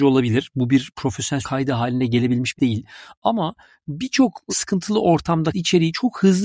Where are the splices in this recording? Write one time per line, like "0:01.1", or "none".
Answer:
0:01.4
0:02.6
0:04.5
0:05.5